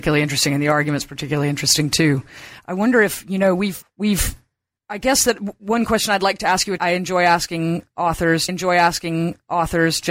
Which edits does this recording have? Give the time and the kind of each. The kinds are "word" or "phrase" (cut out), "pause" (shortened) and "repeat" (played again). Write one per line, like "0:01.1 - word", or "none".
0:03.8 - word
0:06.8 - word
0:08.5 - repeat